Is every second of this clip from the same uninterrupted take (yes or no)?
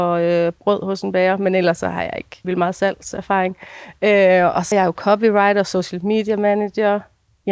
no